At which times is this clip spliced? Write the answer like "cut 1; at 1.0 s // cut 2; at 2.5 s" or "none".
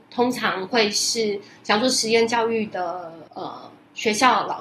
cut 1; at 3.3 s